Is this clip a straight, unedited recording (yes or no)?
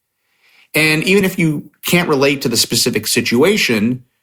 yes